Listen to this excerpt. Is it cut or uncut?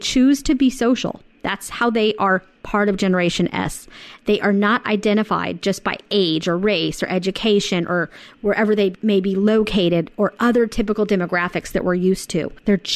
uncut